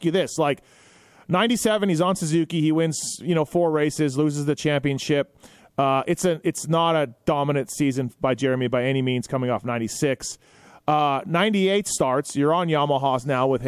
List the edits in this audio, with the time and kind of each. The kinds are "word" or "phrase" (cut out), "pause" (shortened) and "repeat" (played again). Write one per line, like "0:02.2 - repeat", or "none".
none